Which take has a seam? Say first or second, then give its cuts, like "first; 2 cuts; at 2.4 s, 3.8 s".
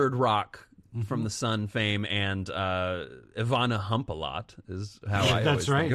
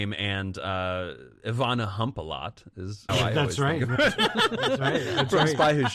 second; 1 cut; at 3.1 s